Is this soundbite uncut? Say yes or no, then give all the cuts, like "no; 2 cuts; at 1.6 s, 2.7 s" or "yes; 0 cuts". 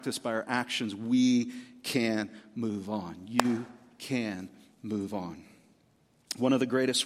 yes; 0 cuts